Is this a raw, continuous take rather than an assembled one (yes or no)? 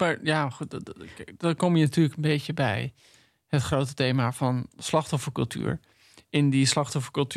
yes